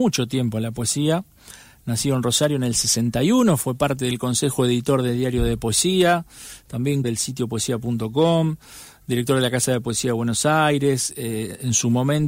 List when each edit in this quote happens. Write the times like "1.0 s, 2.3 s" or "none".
7.0 s